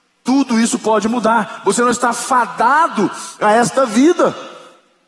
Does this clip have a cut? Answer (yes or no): no